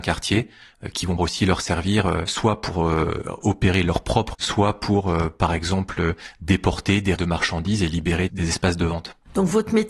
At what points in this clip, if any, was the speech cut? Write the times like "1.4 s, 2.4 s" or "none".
1.2 s, 4.3 s, 7.2 s, 8.3 s